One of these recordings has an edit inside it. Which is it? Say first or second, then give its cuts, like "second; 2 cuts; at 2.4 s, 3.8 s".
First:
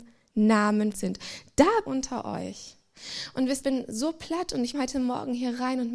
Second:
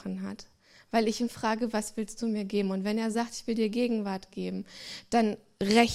first; 4 cuts; at 0.9 s, 1.9 s, 3.6 s, 4.7 s